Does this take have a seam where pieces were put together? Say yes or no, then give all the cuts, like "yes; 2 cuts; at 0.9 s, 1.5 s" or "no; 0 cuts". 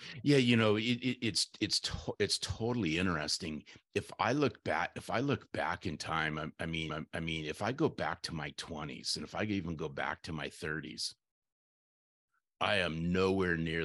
yes; 1 cut; at 6.9 s